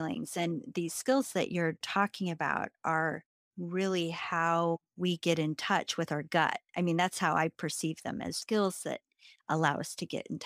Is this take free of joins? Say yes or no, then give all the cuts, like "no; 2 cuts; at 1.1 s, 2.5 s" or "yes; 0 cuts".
no; 2 cuts; at 1.8 s, 8.4 s